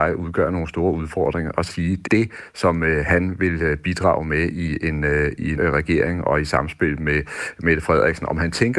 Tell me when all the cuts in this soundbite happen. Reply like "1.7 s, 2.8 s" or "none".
1.7 s, 2.1 s, 5.6 s